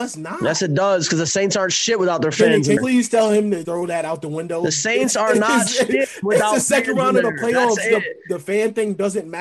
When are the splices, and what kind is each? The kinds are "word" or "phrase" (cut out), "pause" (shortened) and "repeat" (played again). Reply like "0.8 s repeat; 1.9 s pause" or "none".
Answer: 2.8 s word; 3.6 s word